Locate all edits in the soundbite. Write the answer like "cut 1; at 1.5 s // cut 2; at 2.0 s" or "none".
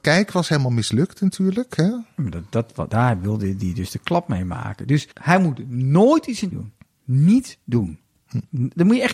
cut 1; at 2.9 s // cut 2; at 5.1 s // cut 3; at 6.5 s